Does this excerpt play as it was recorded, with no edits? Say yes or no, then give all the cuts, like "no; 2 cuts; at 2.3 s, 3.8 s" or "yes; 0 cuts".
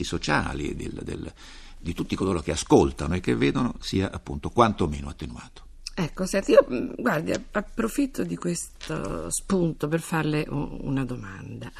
yes; 0 cuts